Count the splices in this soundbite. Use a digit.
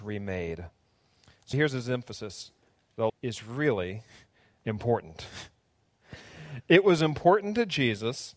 3